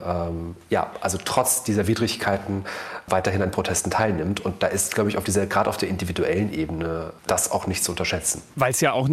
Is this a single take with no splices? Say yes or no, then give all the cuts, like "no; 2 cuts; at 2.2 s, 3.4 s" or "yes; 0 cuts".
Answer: yes; 0 cuts